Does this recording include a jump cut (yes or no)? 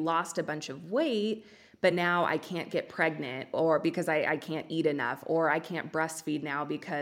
no